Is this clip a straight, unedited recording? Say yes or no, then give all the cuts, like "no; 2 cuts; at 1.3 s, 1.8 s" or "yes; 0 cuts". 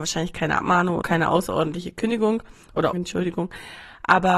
no; 2 cuts; at 1.0 s, 2.9 s